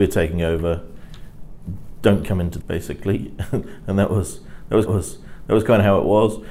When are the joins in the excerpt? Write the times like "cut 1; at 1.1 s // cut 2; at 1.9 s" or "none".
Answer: cut 1; at 2.6 s // cut 2; at 4.9 s